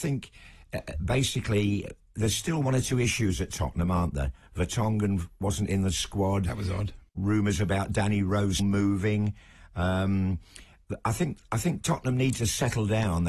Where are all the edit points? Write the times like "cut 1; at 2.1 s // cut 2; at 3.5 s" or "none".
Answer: cut 1; at 7.1 s // cut 2; at 8.6 s